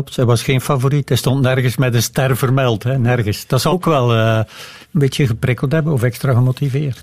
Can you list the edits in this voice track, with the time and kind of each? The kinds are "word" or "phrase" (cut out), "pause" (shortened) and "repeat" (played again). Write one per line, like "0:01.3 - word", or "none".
0:03.7 - word
0:04.8 - pause